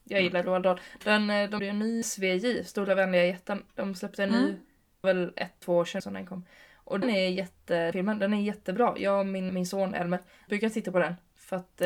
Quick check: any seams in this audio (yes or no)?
yes